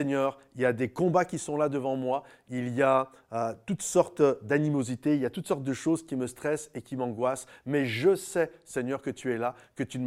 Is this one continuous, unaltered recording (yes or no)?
yes